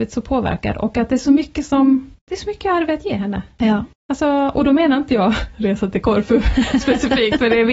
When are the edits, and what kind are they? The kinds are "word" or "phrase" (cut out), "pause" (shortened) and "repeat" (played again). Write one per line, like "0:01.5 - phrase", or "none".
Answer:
0:02.2 - pause
0:03.9 - pause